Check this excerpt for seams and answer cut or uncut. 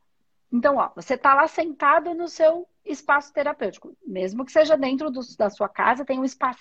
uncut